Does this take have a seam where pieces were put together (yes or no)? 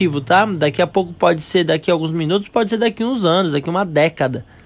no